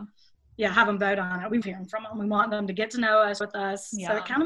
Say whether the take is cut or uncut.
cut